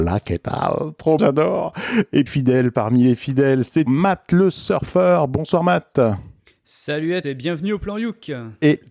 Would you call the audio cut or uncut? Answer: cut